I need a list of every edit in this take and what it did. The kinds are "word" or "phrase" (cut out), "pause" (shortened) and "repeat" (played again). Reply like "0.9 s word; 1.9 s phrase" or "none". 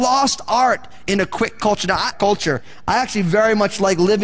2.1 s phrase

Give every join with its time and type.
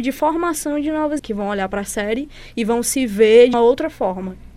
1.2 s word; 3.5 s word

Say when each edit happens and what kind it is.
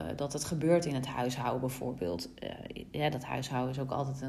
none

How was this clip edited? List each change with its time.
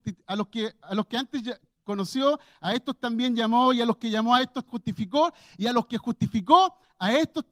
4.7 s word

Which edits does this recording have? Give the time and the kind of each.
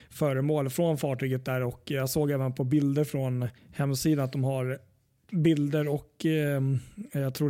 3.6 s pause

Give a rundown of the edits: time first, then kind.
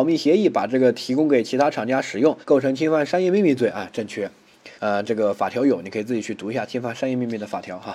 2.4 s pause; 4.8 s pause

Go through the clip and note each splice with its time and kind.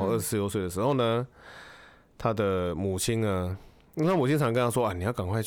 none

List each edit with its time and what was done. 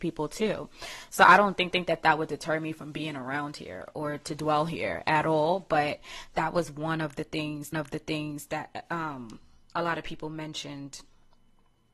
1.7 s repeat; 7.7 s repeat

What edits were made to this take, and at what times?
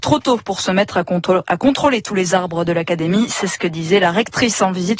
none

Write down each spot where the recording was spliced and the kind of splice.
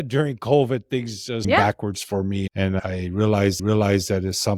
1.4 s phrase; 3.6 s repeat

